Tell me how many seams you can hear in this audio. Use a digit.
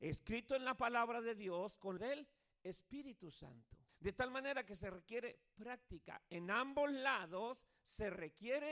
2